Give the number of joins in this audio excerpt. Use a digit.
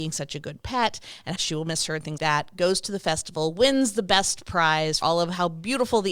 3